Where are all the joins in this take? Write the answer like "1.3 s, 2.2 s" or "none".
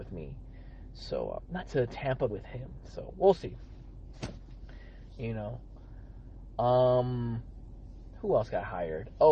1.6 s, 2.3 s